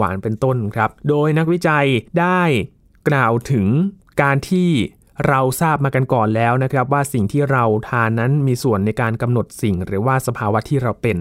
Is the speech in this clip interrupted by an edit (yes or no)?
yes